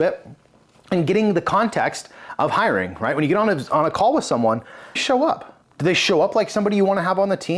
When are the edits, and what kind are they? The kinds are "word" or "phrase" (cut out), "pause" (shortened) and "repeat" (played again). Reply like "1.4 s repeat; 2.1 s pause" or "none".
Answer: 5.0 s phrase; 5.6 s pause